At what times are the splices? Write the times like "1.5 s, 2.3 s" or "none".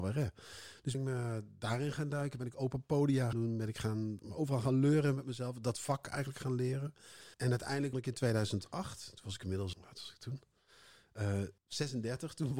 0.9 s, 3.3 s, 4.2 s, 7.3 s, 7.9 s, 9.7 s, 11.6 s